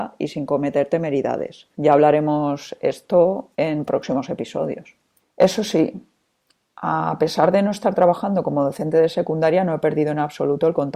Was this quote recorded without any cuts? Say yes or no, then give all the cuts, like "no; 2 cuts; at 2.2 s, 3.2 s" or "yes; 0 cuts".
no; 3 cuts; at 1.7 s, 3.5 s, 5.2 s